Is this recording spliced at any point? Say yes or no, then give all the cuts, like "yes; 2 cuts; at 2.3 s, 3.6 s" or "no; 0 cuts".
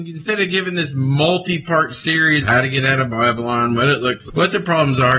yes; 2 cuts; at 2.4 s, 4.3 s